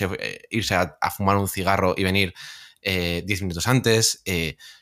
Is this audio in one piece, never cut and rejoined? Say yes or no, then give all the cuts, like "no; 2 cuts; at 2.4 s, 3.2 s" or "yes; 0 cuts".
yes; 0 cuts